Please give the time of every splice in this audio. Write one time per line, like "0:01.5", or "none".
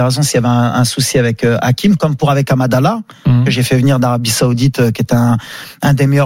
none